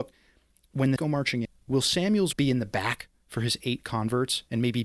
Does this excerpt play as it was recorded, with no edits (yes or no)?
no